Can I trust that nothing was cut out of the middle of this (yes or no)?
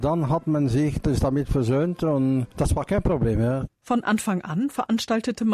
no